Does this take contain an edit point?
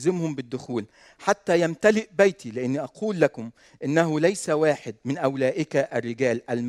no; 0 cuts

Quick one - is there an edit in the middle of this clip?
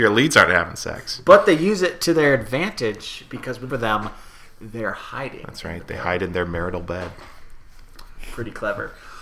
yes; 1 cut; at 3.7 s

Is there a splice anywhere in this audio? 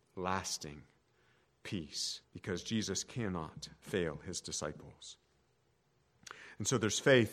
yes; 1 cut; at 2.2 s

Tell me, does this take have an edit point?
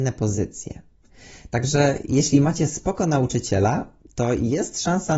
no; 0 cuts

